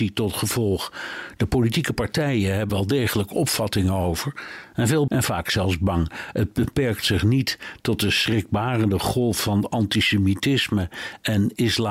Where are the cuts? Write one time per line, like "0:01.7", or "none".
0:02.7
0:05.1